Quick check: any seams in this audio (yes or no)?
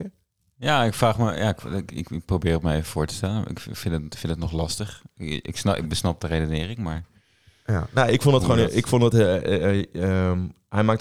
no